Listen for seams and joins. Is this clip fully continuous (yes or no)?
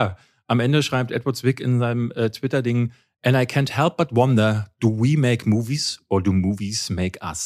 yes